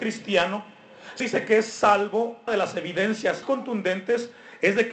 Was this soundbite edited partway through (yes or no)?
yes